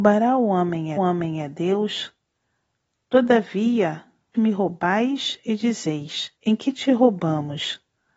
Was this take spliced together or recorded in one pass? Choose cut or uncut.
cut